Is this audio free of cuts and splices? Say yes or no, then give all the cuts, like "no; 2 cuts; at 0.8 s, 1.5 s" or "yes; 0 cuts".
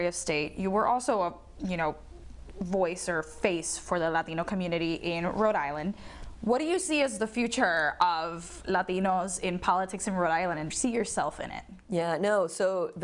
no; 1 cut; at 10.7 s